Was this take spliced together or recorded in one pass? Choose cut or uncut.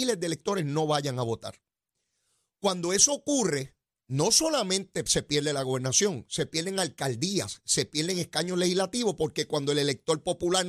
uncut